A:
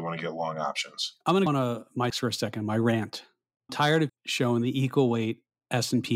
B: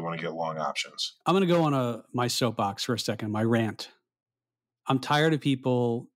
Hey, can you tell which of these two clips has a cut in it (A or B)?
A